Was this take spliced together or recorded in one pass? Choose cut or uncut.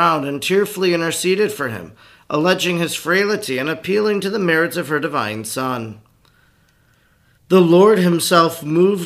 uncut